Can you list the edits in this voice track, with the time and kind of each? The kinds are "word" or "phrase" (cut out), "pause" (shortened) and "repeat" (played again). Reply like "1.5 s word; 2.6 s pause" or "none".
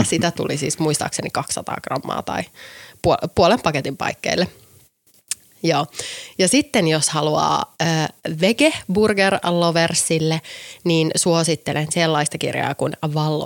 none